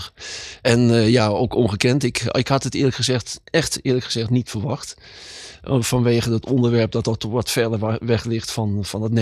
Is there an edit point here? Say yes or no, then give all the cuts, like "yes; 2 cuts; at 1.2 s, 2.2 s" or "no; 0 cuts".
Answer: yes; 1 cut; at 3.5 s